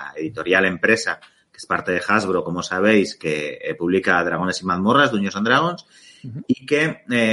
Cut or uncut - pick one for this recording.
uncut